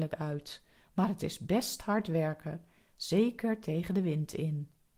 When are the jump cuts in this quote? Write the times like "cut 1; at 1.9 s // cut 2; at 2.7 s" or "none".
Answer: none